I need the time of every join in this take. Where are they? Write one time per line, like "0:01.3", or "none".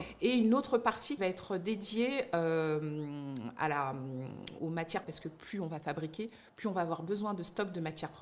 0:01.2
0:04.6
0:05.0